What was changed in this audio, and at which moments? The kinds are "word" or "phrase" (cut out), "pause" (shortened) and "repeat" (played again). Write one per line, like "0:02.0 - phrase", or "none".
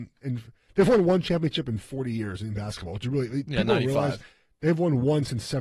none

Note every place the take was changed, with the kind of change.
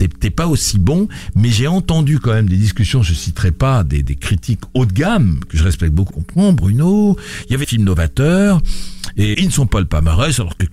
0:04.0 - word
0:06.1 - phrase
0:07.6 - word
0:09.3 - word

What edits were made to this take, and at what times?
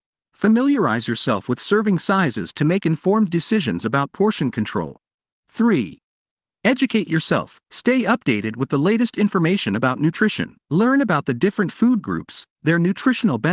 0:05.3 - pause
0:07.6 - pause
0:10.6 - pause

